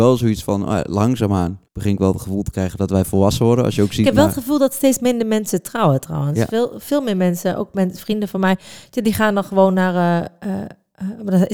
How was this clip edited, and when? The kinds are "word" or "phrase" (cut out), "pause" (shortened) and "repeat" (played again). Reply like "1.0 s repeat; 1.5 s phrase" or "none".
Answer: 1.7 s pause

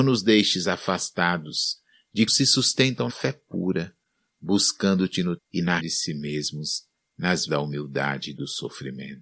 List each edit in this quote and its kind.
2.3 s word; 3.1 s word; 5.4 s word; 5.8 s word; 7.5 s word

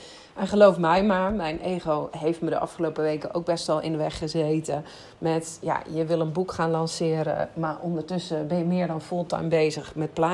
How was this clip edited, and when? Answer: none

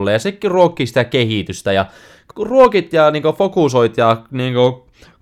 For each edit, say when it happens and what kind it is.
2.3 s word

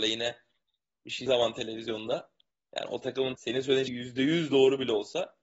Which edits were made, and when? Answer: 1.3 s word; 2.5 s pause; 3.3 s word; 3.9 s word

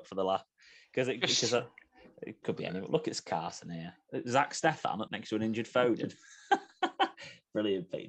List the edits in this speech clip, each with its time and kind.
2.4 s word; 5.1 s phrase

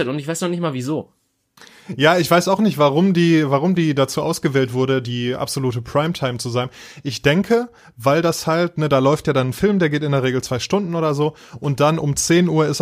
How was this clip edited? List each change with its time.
none

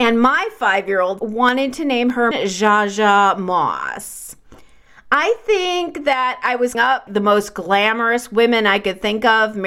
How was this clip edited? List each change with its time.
1.2 s word; 2.3 s word; 6.7 s word; 7.1 s word

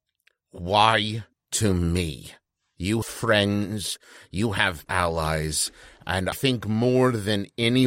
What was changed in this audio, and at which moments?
1.3 s word; 3.0 s word; 4.9 s word; 6.3 s word

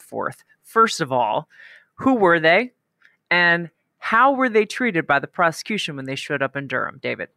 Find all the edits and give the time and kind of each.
none

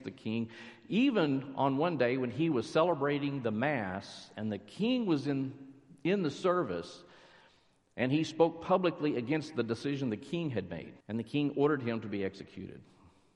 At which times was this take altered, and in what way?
11.0 s pause

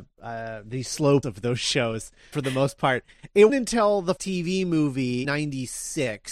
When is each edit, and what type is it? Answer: 1.2 s word; 2.3 s word; 3.5 s word; 4.2 s word; 5.2 s word

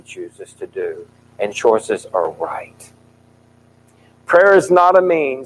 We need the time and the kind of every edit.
1.5 s word

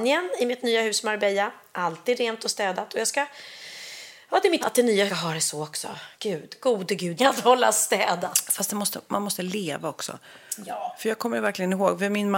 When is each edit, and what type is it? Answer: 4.6 s word; 5.1 s phrase; 6.1 s pause; 7.2 s phrase

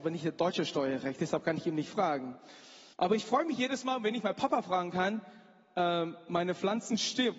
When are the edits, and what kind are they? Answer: 2.9 s pause

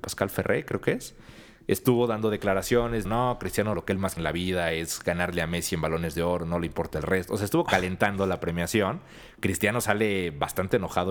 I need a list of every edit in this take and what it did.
3.0 s word; 3.7 s word; 4.2 s word; 7.7 s word

